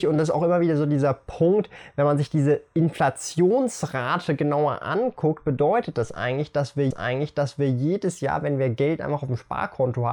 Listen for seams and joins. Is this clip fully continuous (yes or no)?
no